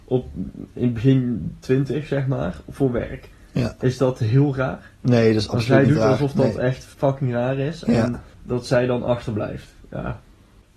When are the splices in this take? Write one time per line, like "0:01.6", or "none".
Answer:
0:06.9
0:08.3
0:09.8

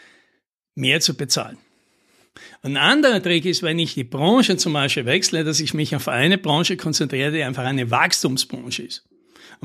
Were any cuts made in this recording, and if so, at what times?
none

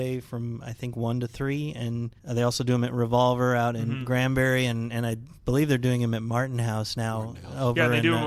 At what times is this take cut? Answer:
0:02.2

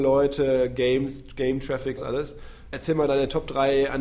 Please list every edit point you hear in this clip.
0:02.0

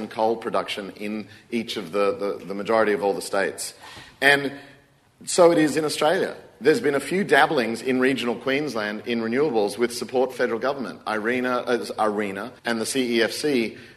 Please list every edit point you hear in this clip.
0:10.3
0:12.6

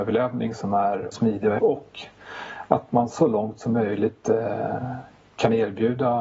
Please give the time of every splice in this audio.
0:01.1
0:01.6
0:03.1

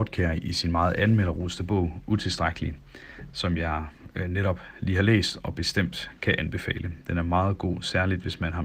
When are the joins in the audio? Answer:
none

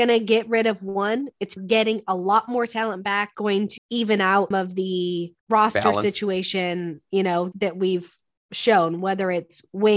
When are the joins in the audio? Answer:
0:01.6
0:03.3
0:03.8
0:04.5
0:05.4
0:07.5

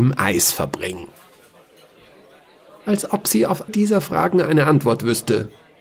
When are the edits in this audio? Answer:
0:03.7

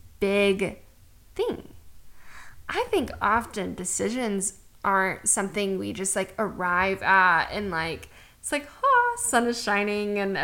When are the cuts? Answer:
none

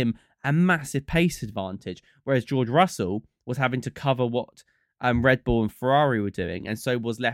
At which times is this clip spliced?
none

